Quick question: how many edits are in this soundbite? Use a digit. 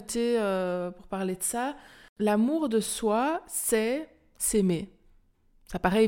0